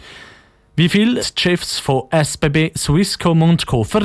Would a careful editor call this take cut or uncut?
cut